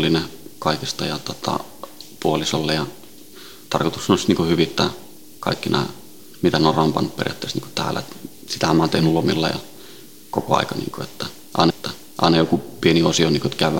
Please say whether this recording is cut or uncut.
cut